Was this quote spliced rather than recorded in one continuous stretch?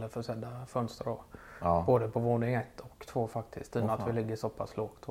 no; 0 cuts

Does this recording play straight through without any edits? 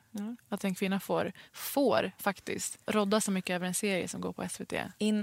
no; 1 cut; at 2.8 s

